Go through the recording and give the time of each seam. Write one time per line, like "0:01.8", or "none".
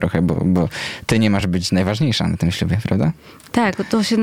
none